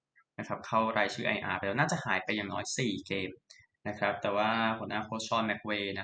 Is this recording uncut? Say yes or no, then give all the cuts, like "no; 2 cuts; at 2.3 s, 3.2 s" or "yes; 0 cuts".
yes; 0 cuts